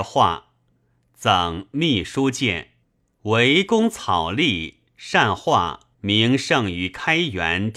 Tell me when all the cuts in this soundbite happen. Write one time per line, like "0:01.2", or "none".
0:02.8
0:05.9